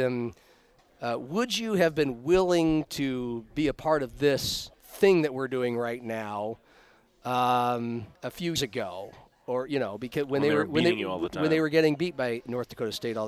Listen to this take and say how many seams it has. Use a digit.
3